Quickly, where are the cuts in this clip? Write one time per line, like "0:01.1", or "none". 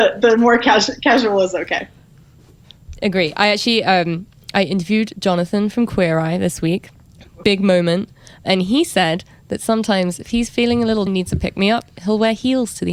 0:11.1